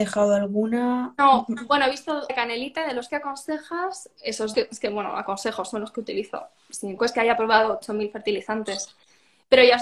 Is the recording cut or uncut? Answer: cut